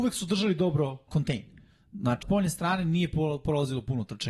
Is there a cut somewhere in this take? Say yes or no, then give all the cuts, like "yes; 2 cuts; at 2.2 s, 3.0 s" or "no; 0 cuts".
yes; 2 cuts; at 1.1 s, 2.2 s